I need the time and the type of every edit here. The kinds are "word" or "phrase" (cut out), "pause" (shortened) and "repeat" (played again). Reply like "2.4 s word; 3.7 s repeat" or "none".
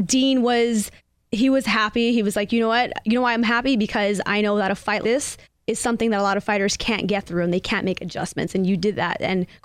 1.0 s pause; 5.0 s word; 5.4 s pause